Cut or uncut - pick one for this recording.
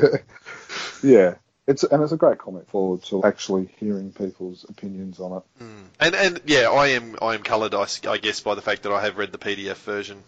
cut